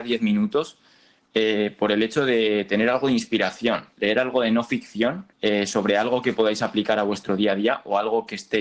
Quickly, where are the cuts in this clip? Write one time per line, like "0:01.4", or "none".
0:05.3